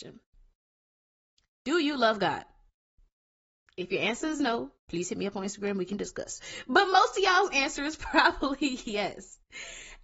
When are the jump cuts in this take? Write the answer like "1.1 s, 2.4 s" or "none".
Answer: 4.8 s

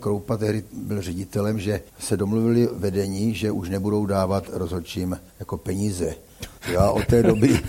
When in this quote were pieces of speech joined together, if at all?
1.9 s, 5.3 s, 6.6 s

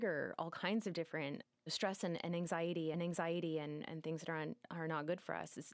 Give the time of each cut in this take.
2.9 s

